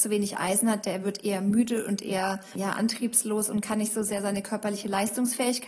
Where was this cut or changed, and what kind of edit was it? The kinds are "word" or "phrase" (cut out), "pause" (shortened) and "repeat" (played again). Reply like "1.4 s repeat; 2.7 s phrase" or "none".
none